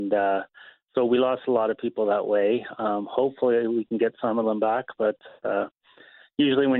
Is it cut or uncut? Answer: uncut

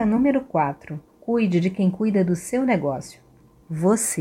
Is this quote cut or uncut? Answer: cut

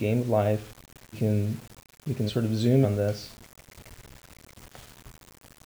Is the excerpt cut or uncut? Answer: cut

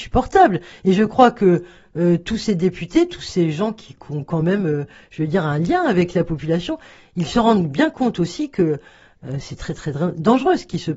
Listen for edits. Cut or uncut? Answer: uncut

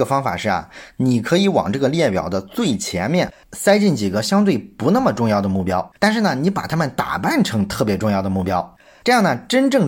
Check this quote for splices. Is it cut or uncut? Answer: cut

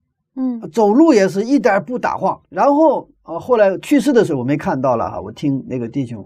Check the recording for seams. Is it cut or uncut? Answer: cut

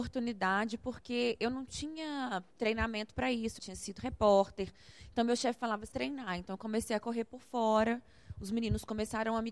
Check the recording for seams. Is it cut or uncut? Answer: cut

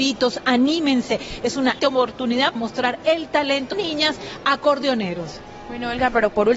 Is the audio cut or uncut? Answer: cut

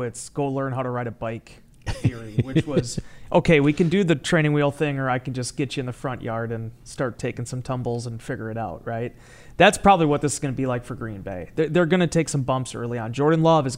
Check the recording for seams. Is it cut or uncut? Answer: uncut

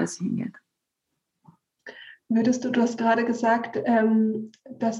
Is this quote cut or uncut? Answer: uncut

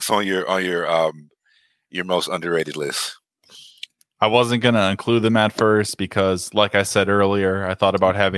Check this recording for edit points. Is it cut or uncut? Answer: uncut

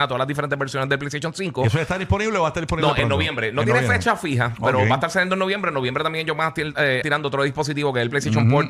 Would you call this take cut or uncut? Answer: cut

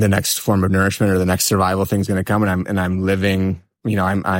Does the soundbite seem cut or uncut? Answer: uncut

